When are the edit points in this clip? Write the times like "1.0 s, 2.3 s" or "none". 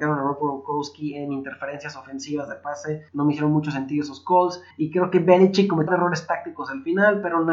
3.1 s, 4.7 s, 5.9 s